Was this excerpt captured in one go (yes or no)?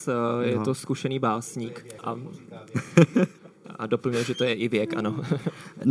no